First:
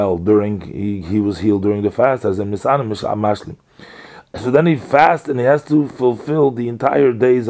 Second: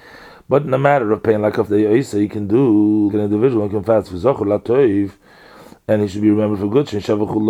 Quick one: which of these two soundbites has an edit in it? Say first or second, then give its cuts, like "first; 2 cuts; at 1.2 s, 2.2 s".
second; 2 cuts; at 1.7 s, 3.1 s